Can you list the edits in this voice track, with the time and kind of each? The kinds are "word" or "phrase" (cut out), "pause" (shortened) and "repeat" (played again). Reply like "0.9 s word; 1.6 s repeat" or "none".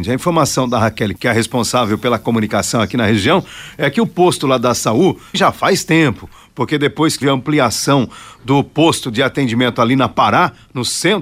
1.2 s word; 5.3 s word; 7.2 s word